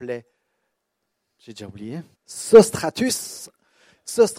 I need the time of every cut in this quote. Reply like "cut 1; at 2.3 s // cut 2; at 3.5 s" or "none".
cut 1; at 2.1 s